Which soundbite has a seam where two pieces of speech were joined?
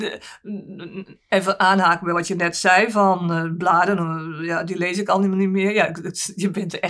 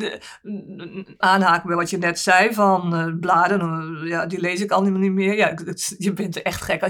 second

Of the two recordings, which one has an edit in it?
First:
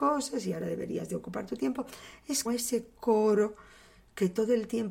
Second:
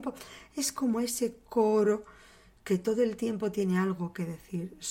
first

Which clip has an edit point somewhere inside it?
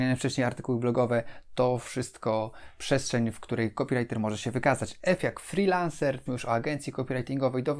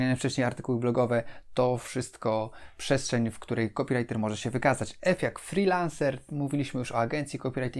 first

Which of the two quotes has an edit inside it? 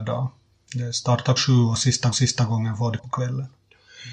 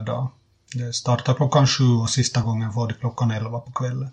first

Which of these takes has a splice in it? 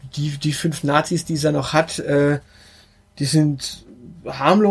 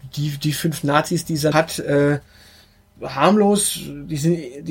second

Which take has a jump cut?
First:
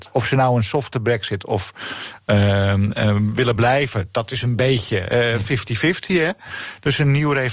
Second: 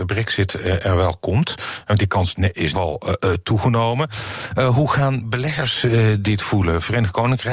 second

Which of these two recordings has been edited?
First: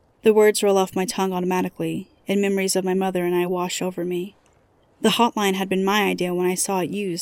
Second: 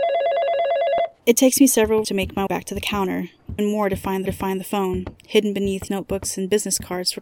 second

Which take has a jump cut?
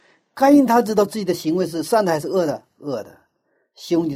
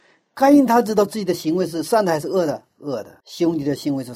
second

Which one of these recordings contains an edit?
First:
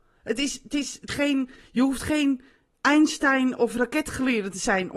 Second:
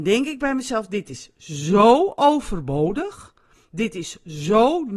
first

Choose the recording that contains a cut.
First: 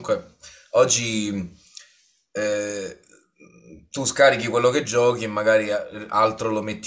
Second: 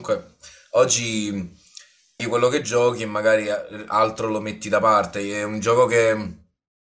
second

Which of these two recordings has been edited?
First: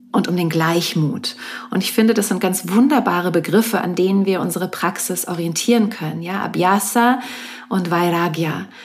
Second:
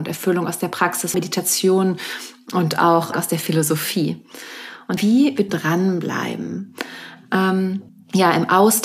second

